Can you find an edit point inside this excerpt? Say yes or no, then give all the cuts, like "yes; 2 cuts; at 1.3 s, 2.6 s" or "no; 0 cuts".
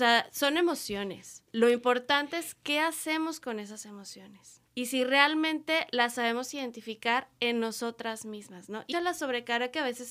yes; 3 cuts; at 1.5 s, 4.7 s, 8.9 s